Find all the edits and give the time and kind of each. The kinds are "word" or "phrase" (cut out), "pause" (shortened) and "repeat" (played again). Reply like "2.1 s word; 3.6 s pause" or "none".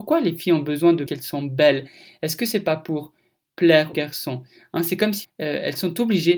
1.1 s word; 3.9 s word; 5.2 s word